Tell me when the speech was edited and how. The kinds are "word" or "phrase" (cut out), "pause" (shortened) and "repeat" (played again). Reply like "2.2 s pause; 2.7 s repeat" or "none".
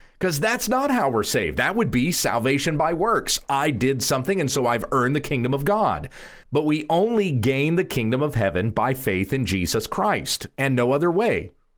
6.4 s pause